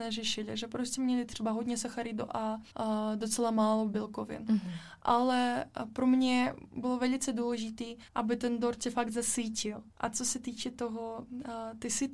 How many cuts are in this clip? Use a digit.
3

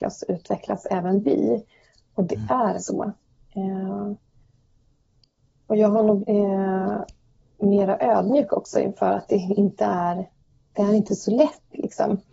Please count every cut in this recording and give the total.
2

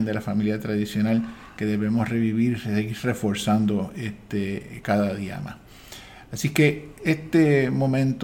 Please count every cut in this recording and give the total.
1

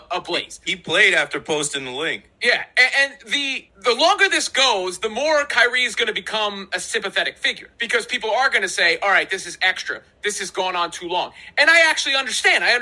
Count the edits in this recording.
2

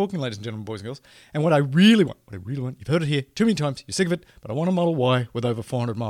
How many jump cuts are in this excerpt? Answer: 0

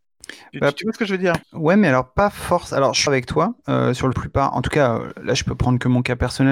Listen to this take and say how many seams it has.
4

